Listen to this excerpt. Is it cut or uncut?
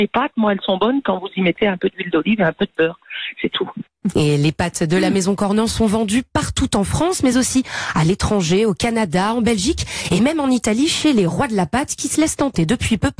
uncut